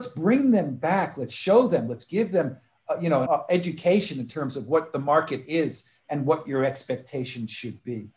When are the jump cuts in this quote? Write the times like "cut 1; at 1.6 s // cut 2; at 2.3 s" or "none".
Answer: cut 1; at 3.3 s